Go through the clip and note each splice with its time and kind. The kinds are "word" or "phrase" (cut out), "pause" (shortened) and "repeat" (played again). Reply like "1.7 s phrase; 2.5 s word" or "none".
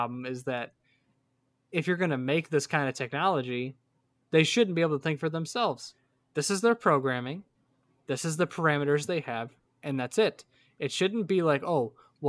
none